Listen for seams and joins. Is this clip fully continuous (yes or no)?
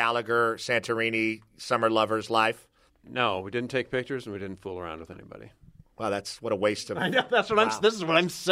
yes